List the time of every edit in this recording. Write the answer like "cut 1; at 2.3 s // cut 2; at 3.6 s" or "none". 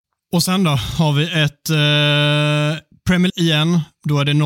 cut 1; at 3.3 s